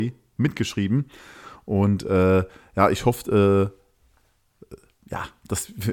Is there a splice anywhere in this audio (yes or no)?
no